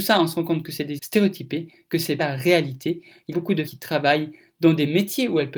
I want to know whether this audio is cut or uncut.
cut